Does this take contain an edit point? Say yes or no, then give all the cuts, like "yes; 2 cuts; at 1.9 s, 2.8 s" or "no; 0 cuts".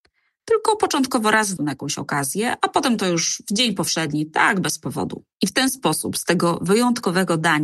yes; 2 cuts; at 1.6 s, 5.3 s